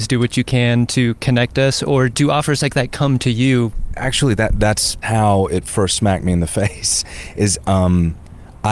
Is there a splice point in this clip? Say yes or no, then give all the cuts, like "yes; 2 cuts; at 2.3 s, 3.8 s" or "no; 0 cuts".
no; 0 cuts